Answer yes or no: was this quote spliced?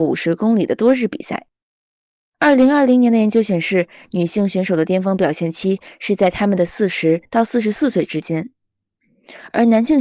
no